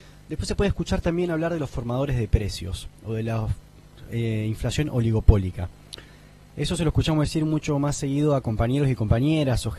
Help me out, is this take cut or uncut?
uncut